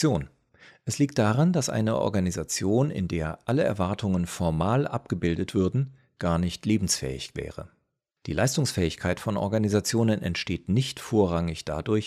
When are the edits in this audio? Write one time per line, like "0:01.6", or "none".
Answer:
none

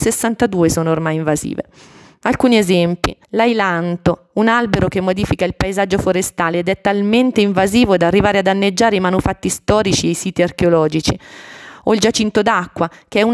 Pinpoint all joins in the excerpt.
0:03.2

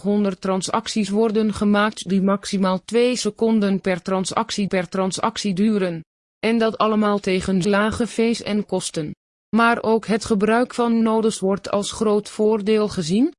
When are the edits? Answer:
0:04.7
0:07.6

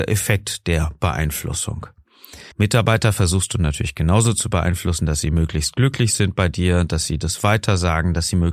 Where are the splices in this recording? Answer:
0:02.5

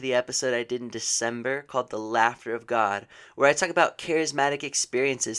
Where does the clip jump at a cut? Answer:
none

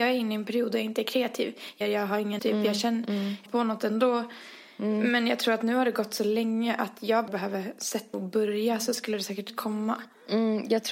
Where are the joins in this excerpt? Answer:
0:01.8
0:02.4
0:03.5
0:07.3
0:08.1

